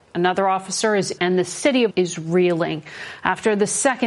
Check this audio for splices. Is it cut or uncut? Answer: cut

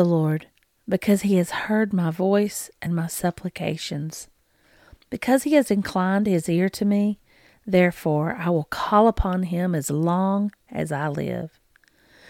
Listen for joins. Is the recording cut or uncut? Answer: uncut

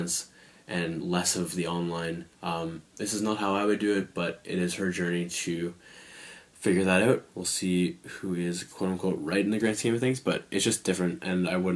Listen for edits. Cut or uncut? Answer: cut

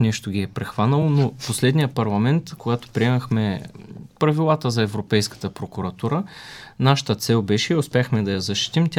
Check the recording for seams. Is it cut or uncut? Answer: uncut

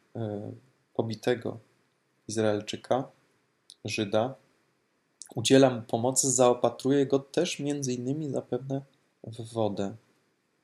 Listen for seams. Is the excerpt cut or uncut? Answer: uncut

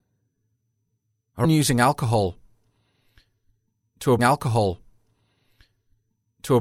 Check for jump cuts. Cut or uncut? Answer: cut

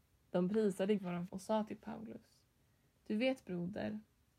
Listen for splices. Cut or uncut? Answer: cut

